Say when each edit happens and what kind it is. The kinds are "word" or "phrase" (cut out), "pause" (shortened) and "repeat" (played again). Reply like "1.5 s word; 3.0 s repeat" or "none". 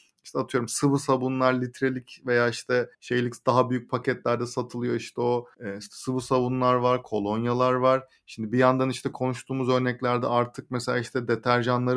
2.9 s pause; 5.5 s pause